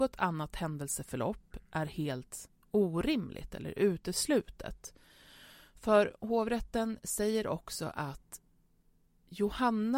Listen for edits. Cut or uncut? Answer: uncut